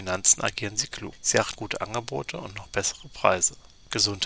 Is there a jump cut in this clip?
yes; 1 cut; at 1.5 s

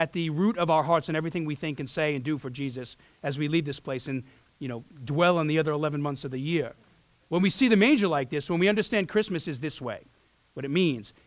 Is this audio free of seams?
yes; 0 cuts

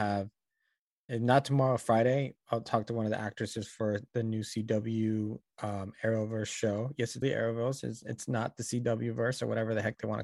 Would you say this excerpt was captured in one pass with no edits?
no; 1 cut; at 7.2 s

